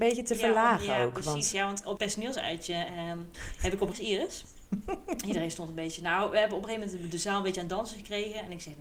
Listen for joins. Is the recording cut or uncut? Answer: cut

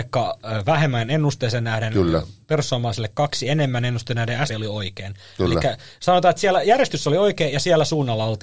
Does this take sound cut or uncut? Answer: cut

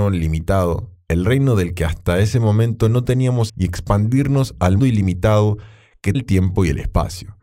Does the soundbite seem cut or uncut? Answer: cut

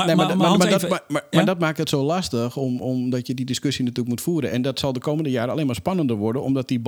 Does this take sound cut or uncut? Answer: uncut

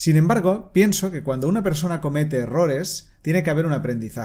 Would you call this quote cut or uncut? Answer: uncut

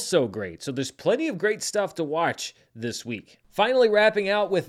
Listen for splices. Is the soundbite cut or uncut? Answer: cut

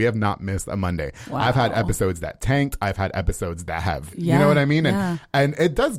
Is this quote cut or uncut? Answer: cut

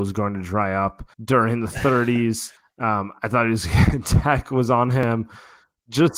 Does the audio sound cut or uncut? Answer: cut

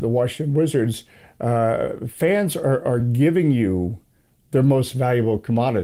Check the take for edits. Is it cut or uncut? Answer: uncut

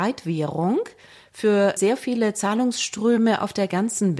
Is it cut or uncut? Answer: uncut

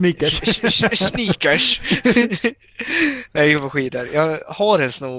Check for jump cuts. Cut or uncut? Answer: uncut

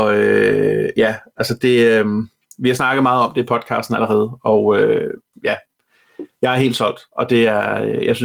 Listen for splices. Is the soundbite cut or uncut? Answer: uncut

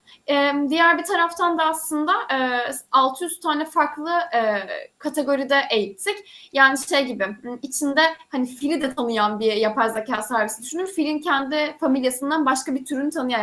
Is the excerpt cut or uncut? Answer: uncut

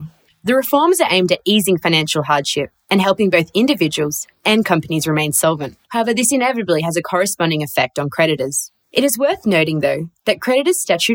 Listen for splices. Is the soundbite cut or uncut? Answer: cut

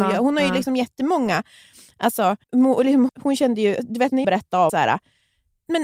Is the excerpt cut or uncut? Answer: cut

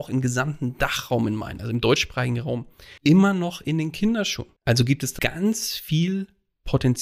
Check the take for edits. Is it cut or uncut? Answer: cut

